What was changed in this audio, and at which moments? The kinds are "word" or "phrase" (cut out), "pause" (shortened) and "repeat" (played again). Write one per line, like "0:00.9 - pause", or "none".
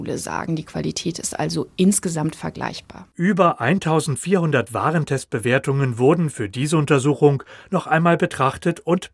none

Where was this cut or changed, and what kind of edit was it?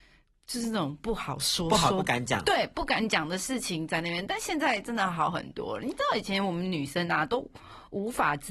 none

